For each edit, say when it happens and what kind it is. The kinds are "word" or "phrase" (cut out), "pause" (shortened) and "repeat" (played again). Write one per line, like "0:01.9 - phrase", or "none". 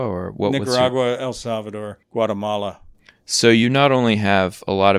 0:02.0 - pause